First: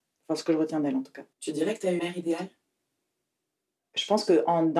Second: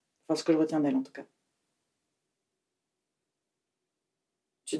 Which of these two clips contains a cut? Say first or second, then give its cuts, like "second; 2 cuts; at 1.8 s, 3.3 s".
first; 2 cuts; at 1.3 s, 2.0 s